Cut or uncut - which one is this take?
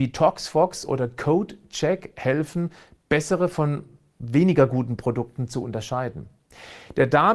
uncut